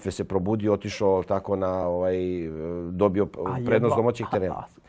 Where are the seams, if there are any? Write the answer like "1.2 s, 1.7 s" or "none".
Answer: none